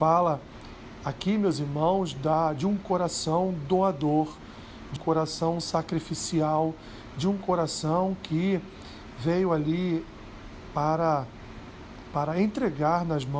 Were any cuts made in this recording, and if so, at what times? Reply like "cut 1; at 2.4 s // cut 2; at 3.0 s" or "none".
cut 1; at 5.0 s